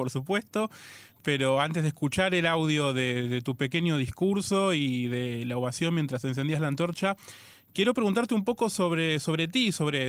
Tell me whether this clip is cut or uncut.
uncut